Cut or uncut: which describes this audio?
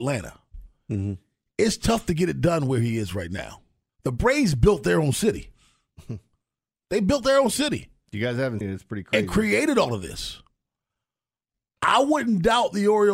cut